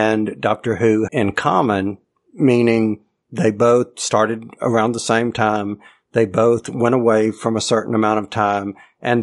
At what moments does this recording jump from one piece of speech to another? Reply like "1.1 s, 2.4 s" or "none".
1.1 s